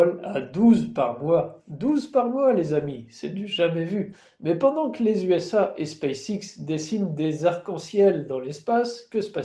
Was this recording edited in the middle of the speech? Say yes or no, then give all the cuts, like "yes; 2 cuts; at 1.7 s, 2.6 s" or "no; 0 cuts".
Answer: no; 0 cuts